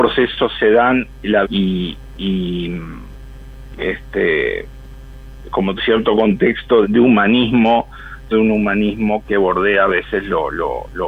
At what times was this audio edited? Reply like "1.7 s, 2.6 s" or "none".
1.4 s, 3.7 s, 5.8 s, 6.8 s, 8.3 s, 9.2 s